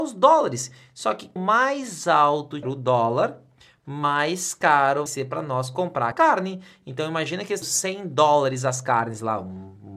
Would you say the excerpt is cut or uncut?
cut